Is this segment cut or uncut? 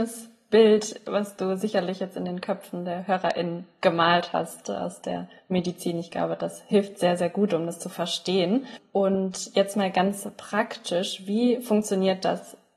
uncut